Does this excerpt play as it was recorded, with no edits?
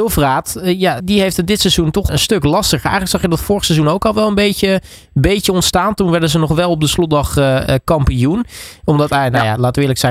no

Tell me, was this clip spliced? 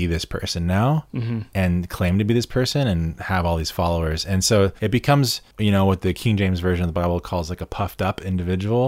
yes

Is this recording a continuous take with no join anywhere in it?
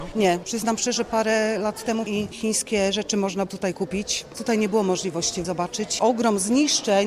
no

